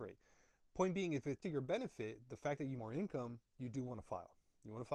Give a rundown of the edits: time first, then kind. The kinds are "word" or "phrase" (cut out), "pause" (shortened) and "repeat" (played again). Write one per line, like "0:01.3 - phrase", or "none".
0:01.4 - word
0:02.8 - word